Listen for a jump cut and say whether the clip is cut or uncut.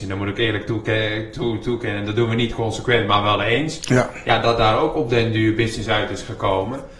uncut